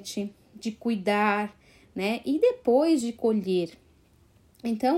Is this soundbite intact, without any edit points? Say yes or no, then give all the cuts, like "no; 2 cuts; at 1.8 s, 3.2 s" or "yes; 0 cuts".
yes; 0 cuts